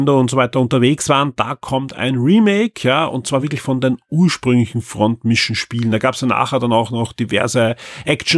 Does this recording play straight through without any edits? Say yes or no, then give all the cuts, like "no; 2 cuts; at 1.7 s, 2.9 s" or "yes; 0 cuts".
yes; 0 cuts